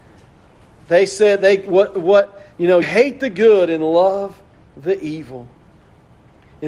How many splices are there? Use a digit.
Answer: 1